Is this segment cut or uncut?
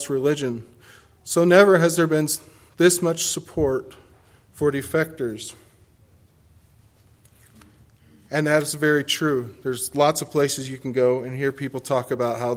uncut